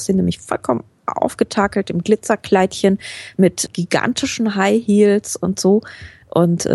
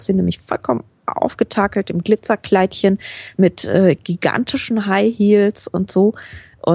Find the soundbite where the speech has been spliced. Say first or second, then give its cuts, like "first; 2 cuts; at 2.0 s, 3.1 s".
first; 1 cut; at 3.7 s